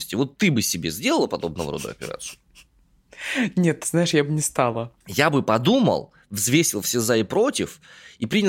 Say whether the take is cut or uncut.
uncut